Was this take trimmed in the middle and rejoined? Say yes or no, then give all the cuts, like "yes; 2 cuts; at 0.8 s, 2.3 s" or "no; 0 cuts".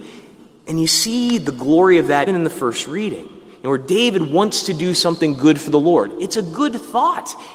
yes; 1 cut; at 2.3 s